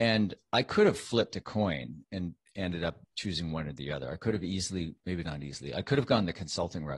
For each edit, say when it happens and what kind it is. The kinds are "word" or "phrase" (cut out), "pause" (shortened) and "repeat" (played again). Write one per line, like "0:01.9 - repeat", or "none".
0:03.0 - pause
0:05.0 - pause